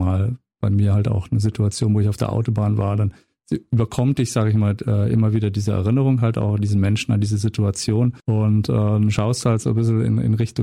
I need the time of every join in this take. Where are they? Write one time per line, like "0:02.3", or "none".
0:08.2